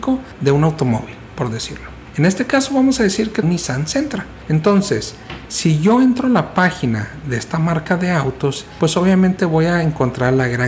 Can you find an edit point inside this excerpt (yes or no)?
yes